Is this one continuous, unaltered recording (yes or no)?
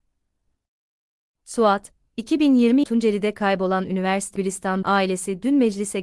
no